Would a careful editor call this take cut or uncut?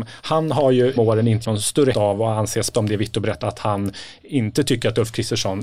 cut